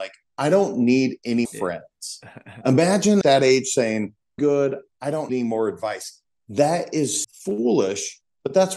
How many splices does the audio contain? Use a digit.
5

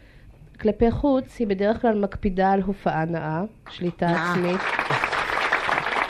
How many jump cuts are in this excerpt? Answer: 0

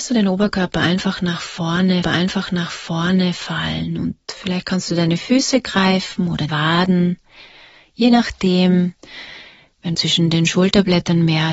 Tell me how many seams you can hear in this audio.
3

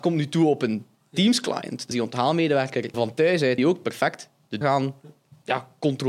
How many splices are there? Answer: 4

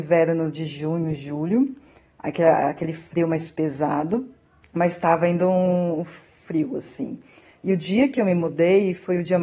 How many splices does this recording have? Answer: 0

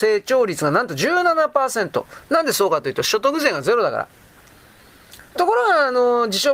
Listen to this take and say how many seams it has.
1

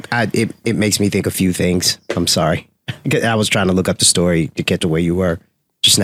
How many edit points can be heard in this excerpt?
1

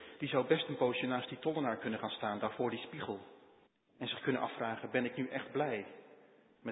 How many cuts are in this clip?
1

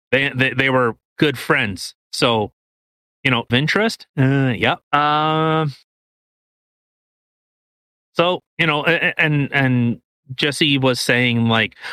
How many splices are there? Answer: 4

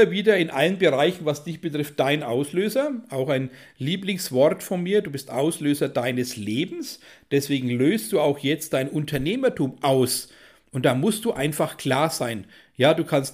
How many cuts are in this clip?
0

